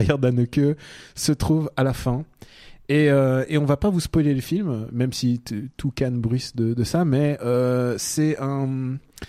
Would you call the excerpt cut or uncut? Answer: uncut